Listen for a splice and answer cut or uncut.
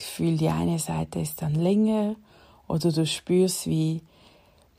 uncut